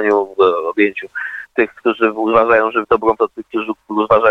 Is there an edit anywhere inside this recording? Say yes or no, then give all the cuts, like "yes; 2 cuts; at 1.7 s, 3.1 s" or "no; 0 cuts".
yes; 3 cuts; at 1.5 s, 2.8 s, 3.2 s